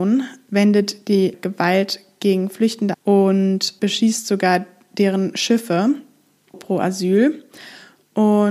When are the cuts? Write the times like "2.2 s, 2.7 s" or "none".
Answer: 1.3 s, 2.9 s, 3.8 s, 6.5 s